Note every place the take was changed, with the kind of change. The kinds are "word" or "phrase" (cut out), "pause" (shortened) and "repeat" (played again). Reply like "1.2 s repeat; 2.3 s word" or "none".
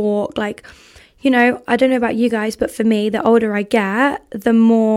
none